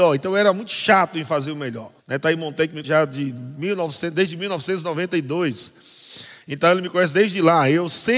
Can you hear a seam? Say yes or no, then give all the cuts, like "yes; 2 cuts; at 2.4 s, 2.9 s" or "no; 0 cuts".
yes; 2 cuts; at 2.0 s, 2.8 s